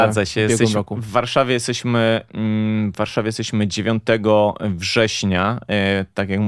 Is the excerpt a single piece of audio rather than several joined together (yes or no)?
yes